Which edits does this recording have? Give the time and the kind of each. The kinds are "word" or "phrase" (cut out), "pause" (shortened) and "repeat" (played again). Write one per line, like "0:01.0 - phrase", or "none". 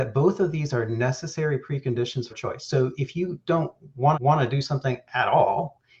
0:02.3 - word
0:04.1 - repeat